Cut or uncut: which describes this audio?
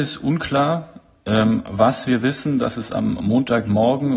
uncut